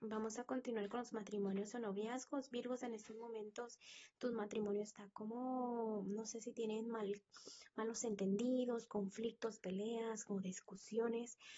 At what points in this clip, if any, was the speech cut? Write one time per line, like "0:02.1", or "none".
none